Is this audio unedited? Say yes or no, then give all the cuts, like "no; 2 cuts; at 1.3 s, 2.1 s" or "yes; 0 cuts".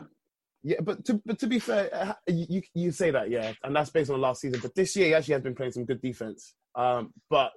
no; 1 cut; at 6.6 s